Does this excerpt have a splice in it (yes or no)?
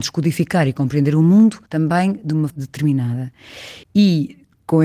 yes